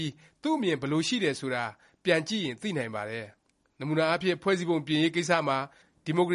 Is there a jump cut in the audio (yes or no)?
no